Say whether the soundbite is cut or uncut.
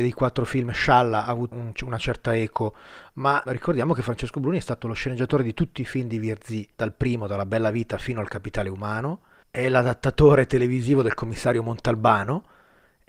cut